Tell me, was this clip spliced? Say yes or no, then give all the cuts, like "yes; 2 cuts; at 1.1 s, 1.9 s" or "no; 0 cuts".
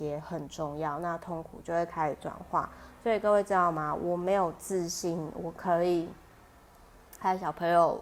no; 0 cuts